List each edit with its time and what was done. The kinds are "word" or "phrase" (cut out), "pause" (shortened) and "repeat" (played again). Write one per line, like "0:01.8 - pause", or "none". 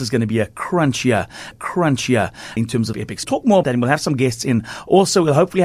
0:01.5 - repeat
0:02.9 - phrase
0:03.2 - word
0:03.6 - word